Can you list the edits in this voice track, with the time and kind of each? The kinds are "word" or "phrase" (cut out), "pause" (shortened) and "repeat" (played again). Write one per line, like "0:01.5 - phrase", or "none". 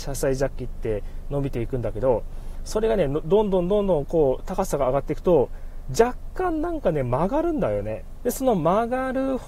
0:08.2 - phrase